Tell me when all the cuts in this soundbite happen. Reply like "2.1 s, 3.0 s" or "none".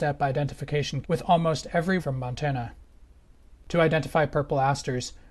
1.0 s, 2.0 s, 3.6 s

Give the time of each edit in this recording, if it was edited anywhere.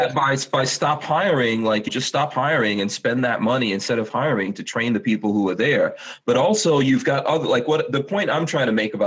1.9 s

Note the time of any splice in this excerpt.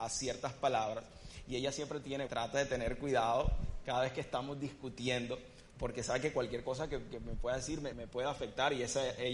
2.3 s, 7.9 s

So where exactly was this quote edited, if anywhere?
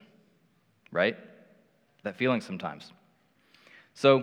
2.0 s

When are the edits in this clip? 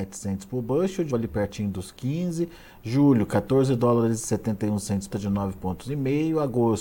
1.1 s, 5.1 s

